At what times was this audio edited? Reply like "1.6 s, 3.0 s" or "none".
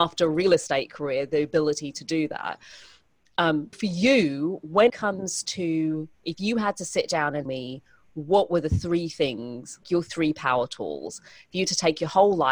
3.7 s, 4.9 s, 7.5 s, 9.8 s